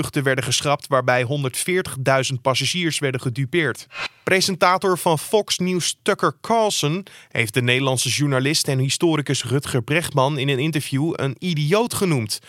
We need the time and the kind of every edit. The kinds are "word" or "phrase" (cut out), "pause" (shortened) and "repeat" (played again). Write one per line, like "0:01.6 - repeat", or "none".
none